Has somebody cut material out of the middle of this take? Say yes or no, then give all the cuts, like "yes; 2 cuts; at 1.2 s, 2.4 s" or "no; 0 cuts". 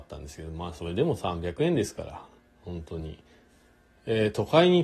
no; 0 cuts